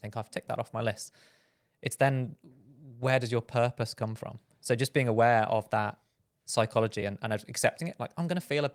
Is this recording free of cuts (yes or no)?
yes